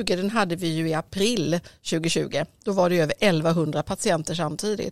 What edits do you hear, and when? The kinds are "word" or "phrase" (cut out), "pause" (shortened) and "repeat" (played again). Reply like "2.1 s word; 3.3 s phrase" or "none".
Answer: none